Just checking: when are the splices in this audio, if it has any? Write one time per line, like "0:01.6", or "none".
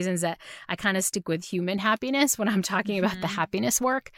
none